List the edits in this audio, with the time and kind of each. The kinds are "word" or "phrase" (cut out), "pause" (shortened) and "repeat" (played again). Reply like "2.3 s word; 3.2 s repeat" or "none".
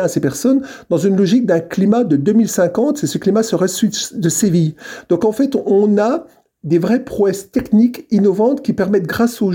none